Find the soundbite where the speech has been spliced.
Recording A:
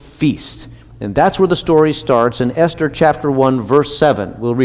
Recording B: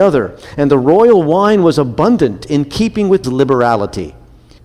B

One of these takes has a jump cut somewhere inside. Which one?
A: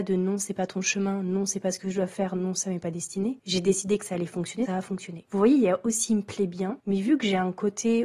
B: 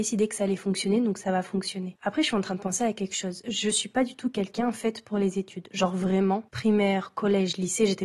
A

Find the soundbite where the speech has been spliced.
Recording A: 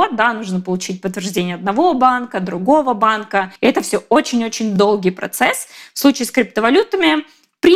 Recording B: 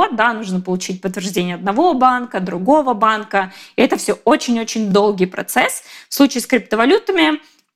A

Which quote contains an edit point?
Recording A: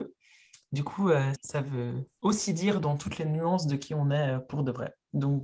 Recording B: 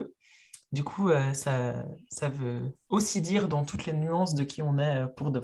A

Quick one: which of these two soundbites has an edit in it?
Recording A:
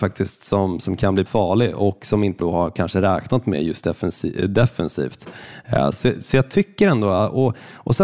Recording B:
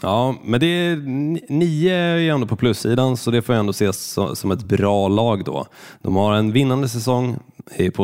A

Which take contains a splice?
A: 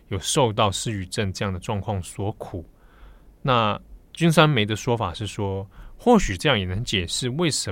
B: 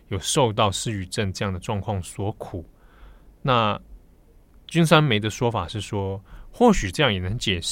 A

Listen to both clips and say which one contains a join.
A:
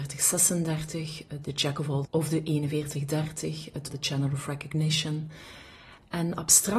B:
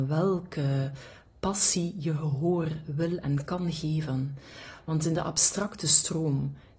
A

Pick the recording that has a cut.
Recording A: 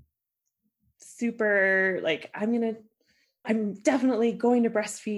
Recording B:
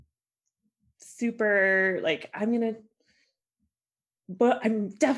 A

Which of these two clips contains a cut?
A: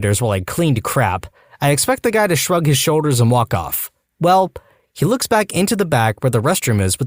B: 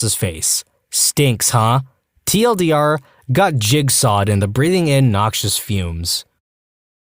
B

